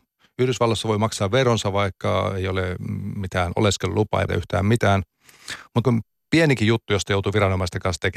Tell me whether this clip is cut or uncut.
cut